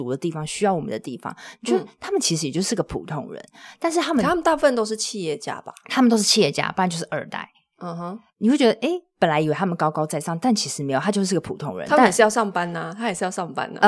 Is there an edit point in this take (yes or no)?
no